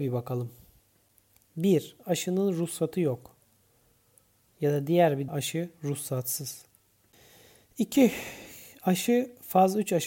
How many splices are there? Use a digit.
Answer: 1